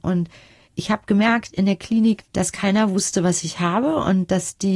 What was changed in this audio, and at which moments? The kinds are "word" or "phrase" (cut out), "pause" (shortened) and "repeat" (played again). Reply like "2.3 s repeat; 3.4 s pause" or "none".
2.2 s word